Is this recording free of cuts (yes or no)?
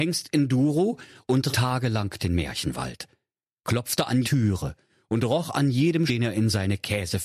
no